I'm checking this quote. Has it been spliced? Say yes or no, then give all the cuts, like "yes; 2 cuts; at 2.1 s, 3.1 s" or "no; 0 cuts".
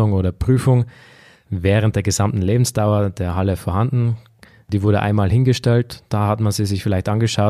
no; 0 cuts